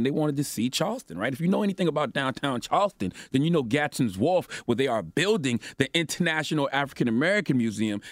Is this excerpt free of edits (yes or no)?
yes